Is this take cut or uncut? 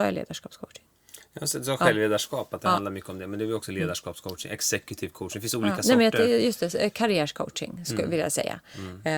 uncut